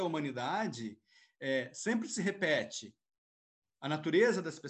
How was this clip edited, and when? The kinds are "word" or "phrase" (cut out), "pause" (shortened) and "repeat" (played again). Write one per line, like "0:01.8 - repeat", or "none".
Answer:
none

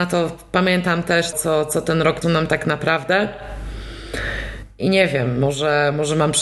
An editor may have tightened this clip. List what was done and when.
0:01.3 - word
0:02.2 - word

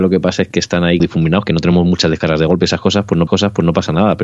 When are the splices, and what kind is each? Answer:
0:01.0 - word
0:03.3 - repeat

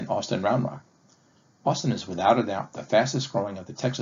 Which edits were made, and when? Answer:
none

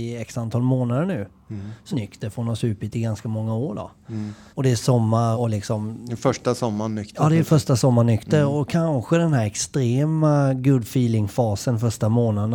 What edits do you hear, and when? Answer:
0:01.9 - phrase
0:04.5 - pause
0:05.3 - word

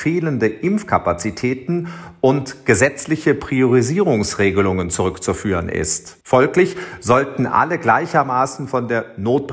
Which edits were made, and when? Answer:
0:06.2 - pause

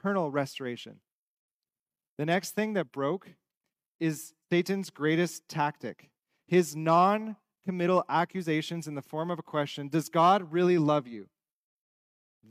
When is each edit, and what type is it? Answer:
0:04.4 - pause
0:06.2 - pause

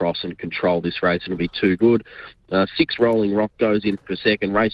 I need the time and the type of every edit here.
none

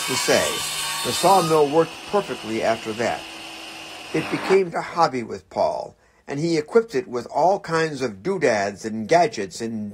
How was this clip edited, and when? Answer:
0:04.7 - word

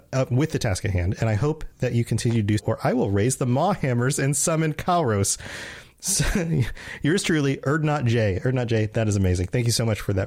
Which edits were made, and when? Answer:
0:02.6 - word

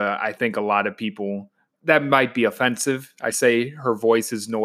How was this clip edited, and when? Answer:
0:01.7 - word
0:03.3 - word

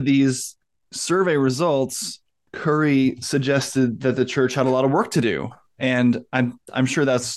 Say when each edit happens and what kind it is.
none

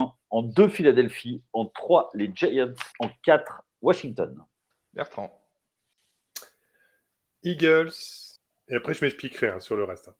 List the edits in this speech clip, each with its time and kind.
0:02.9 - pause
0:04.7 - pause
0:08.4 - pause

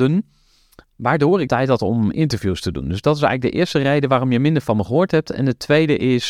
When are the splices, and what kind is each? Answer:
0:01.5 - word

